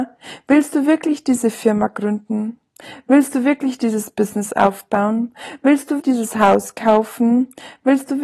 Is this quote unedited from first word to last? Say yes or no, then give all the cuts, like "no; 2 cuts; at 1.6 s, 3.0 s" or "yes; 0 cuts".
no; 1 cut; at 6.0 s